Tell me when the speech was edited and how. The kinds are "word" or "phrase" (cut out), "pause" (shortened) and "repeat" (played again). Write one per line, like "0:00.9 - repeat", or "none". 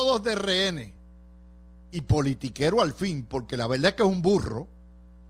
none